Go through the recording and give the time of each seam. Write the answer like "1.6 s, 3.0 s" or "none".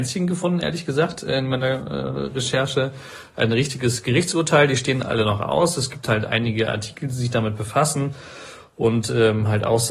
none